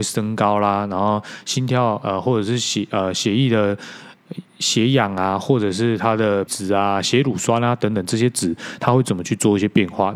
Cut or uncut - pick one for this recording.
cut